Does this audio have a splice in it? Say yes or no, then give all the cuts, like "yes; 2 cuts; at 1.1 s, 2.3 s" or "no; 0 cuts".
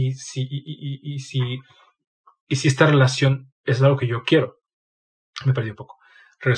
no; 0 cuts